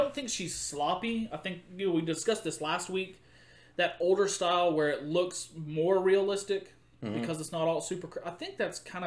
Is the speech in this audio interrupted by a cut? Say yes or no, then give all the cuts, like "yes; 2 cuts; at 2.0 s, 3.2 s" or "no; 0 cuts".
no; 0 cuts